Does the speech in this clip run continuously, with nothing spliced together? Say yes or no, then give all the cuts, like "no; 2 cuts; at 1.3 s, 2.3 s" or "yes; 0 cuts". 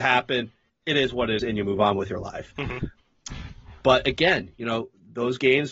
no; 1 cut; at 1.4 s